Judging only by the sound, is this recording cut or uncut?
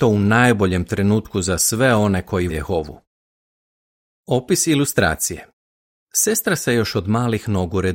cut